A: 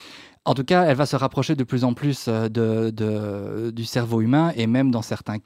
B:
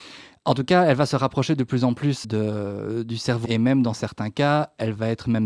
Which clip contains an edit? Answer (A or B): B